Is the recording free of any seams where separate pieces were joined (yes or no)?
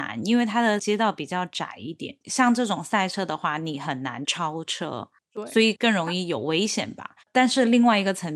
no